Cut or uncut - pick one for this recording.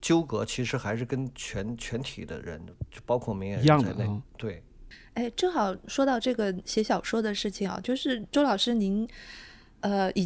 uncut